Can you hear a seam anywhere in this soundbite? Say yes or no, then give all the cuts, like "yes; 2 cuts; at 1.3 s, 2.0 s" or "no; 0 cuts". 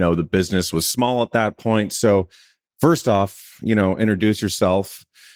no; 0 cuts